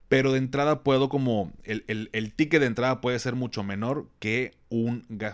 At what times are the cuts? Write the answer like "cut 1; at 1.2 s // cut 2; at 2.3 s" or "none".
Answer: none